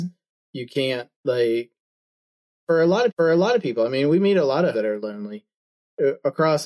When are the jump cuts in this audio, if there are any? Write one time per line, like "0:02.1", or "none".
0:01.1
0:03.1
0:04.7